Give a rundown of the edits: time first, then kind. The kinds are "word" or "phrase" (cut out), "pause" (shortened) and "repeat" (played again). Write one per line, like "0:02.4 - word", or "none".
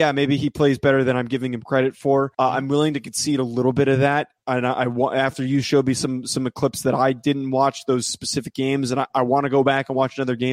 0:02.3 - pause